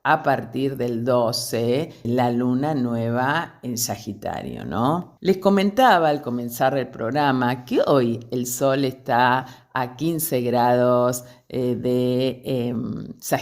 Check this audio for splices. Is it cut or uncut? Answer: cut